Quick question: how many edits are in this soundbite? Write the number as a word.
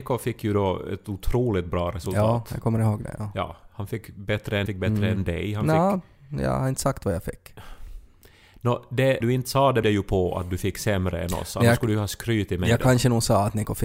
three